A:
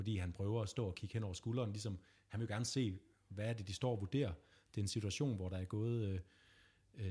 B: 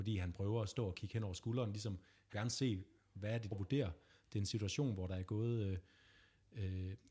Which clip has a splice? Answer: B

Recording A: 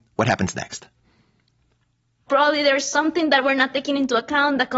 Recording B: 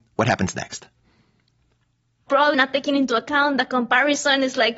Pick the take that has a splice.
B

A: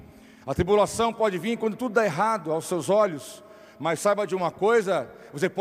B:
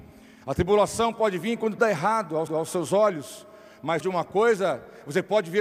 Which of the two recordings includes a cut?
B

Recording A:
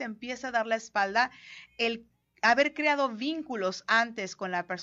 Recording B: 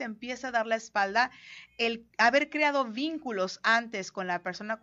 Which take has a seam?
B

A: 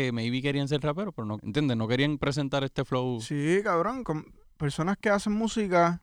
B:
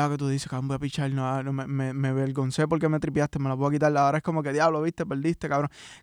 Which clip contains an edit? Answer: A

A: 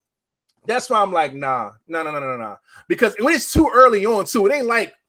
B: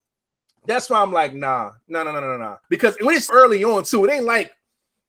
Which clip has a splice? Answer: B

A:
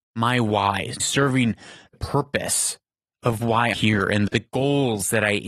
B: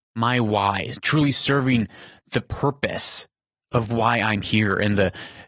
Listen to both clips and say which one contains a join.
A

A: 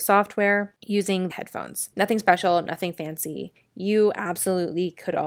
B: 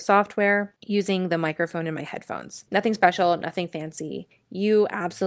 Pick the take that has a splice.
A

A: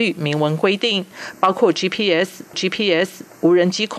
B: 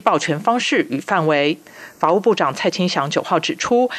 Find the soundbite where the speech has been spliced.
A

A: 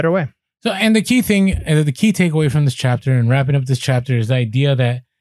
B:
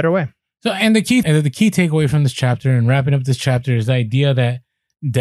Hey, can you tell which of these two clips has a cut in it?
B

